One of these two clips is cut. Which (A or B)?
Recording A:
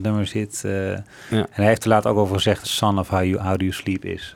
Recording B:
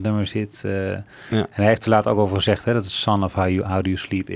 A